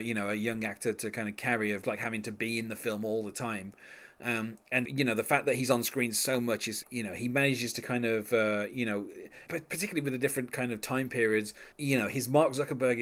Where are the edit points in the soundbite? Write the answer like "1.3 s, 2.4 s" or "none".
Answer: 1.8 s, 4.9 s, 6.8 s, 9.5 s, 11.7 s